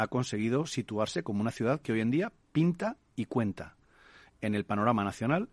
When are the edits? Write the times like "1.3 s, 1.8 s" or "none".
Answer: none

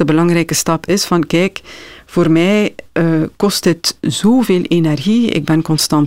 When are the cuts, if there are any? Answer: none

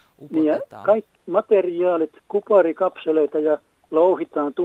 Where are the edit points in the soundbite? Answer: 1.1 s, 2.2 s

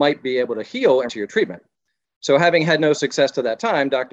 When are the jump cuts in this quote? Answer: 1.1 s

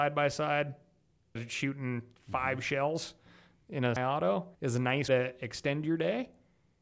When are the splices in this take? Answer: 1.4 s, 4.0 s, 4.5 s, 5.1 s

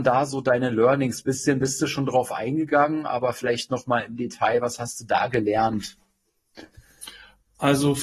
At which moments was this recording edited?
none

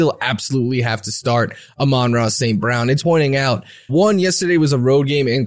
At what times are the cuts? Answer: 3.0 s, 3.9 s

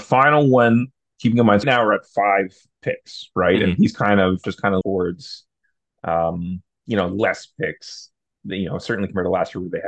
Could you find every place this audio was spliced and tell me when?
1.6 s, 4.4 s, 4.8 s

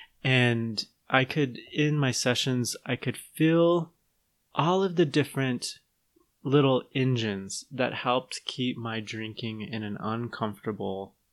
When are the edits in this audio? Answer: none

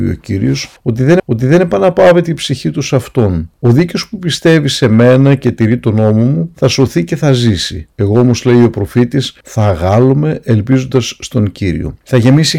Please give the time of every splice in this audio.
1.2 s

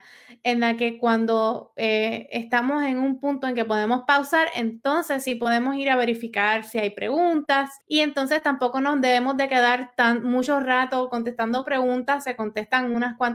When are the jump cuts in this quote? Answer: 7.8 s

